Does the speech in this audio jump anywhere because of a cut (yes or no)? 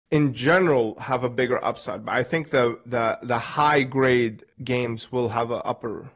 yes